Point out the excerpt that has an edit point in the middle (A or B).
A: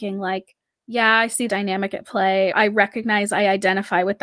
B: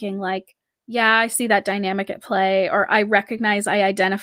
A